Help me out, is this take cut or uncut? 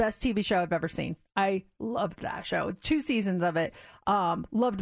uncut